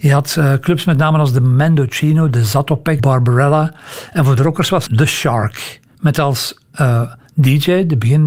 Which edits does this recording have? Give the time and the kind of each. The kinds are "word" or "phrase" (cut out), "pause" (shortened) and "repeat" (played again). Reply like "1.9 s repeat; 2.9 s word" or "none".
3.0 s word; 4.9 s word; 6.7 s pause